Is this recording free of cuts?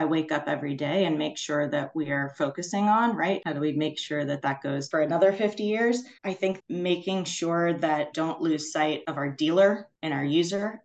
no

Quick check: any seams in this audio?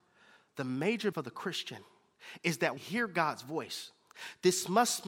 yes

